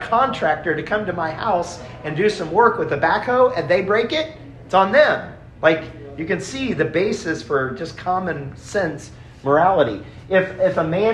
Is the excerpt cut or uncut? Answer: uncut